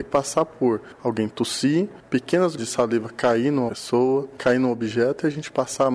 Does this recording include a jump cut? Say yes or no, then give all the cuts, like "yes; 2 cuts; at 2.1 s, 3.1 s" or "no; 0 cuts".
yes; 3 cuts; at 2.6 s, 3.7 s, 4.4 s